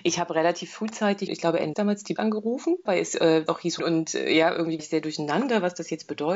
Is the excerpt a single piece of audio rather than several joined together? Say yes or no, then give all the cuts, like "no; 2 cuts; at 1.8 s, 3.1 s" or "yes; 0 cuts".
no; 7 cuts; at 1.3 s, 1.7 s, 2.2 s, 2.9 s, 3.5 s, 3.8 s, 4.8 s